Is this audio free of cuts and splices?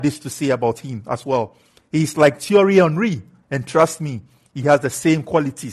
yes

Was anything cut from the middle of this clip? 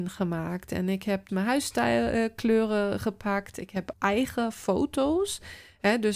yes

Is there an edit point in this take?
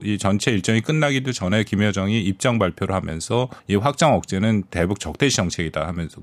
yes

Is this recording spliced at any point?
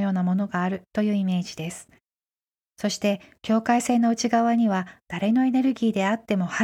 no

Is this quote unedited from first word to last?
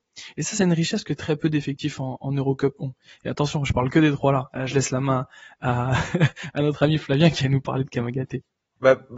yes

